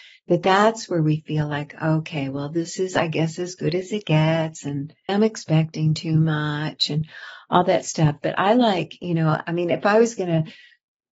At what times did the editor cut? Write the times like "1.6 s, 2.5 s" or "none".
5.1 s